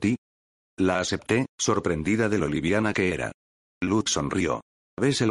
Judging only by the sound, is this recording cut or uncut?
uncut